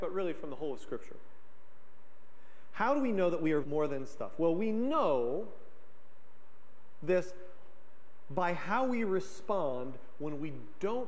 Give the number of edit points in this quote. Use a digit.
1